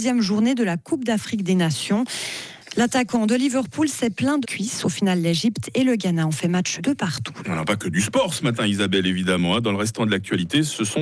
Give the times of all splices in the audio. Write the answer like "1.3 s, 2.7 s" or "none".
4.4 s, 6.8 s